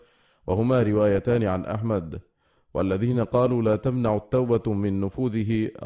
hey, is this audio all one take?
yes; 0 cuts

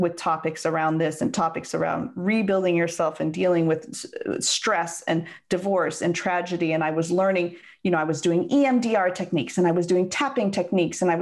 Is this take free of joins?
yes; 0 cuts

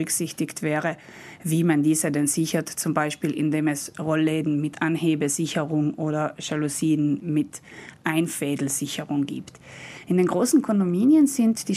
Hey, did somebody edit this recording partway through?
no; 0 cuts

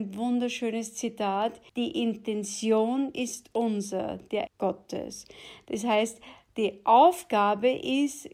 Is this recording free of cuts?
no; 2 cuts; at 1.7 s, 4.5 s

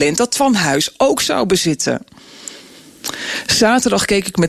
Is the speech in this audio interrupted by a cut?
no; 0 cuts

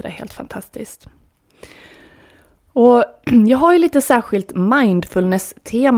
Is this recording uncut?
yes; 0 cuts

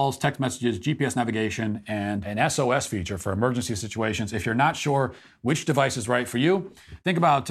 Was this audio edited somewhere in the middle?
no; 0 cuts

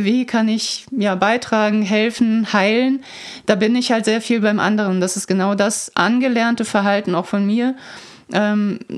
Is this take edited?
no; 0 cuts

